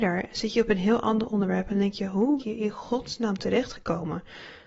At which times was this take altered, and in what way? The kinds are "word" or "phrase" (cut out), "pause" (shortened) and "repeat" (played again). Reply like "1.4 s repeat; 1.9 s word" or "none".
2.4 s phrase